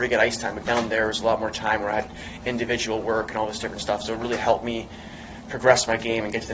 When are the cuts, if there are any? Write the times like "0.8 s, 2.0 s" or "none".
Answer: none